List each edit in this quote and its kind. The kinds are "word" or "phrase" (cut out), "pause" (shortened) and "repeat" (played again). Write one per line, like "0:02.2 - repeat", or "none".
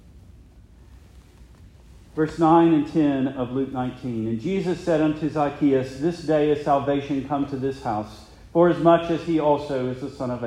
none